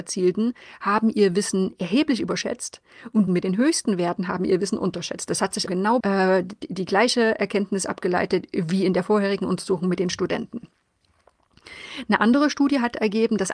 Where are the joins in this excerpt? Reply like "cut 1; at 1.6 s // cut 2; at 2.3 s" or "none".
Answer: cut 1; at 3.3 s // cut 2; at 5.7 s // cut 3; at 6.0 s

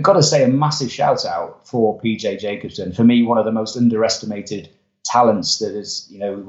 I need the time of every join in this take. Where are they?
none

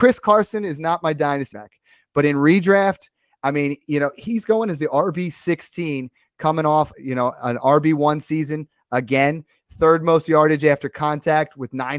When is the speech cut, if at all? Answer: cut 1; at 1.5 s // cut 2; at 6.9 s

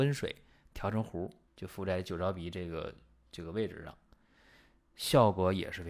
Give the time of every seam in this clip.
cut 1; at 1.5 s

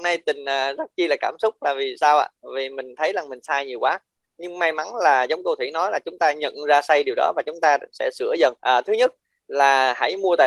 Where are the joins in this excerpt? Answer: cut 1; at 8.6 s

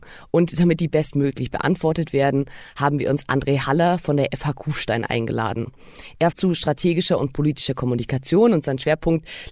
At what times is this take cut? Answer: cut 1; at 6.3 s

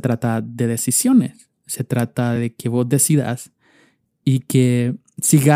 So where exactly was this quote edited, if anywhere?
none

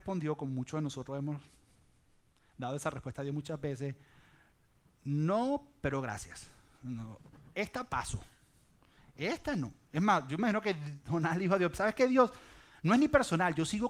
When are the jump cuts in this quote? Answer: none

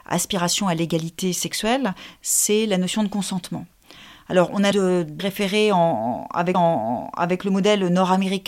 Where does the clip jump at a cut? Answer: cut 1; at 4.7 s // cut 2; at 5.2 s // cut 3; at 6.5 s

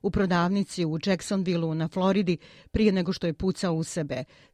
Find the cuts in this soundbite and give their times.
none

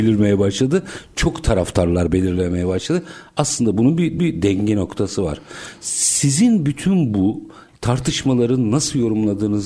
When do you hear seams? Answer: cut 1; at 4.2 s

